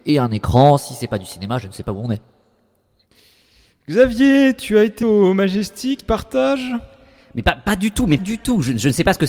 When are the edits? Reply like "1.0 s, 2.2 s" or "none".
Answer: 5.0 s, 6.0 s, 8.2 s